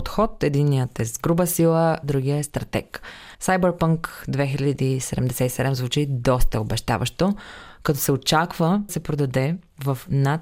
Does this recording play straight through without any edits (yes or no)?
no